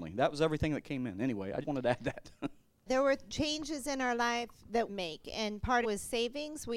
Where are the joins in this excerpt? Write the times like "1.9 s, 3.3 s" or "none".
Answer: 1.6 s, 2.9 s, 4.9 s, 5.8 s